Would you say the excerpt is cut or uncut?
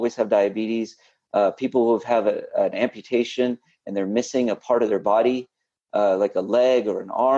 uncut